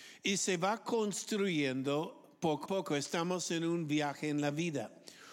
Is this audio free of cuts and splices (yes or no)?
no